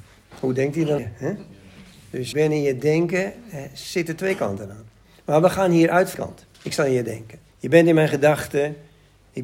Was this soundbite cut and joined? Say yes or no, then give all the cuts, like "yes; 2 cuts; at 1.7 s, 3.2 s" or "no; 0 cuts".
yes; 6 cuts; at 1.0 s, 2.3 s, 5.0 s, 6.1 s, 6.5 s, 7.5 s